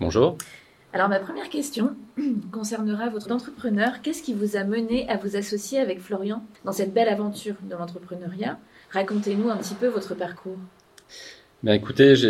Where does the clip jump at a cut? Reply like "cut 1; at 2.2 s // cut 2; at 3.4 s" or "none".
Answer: cut 1; at 3.2 s // cut 2; at 6.5 s